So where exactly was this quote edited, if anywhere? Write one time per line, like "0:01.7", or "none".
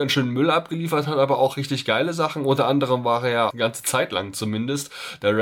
0:03.5